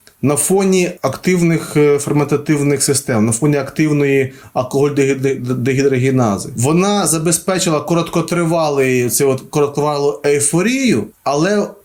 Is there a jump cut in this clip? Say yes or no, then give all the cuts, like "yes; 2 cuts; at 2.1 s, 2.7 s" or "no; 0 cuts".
no; 0 cuts